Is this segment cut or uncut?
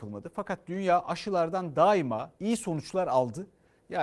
cut